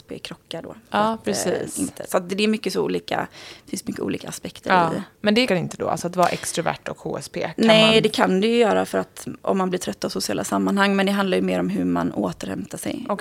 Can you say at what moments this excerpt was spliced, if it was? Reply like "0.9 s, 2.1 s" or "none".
5.5 s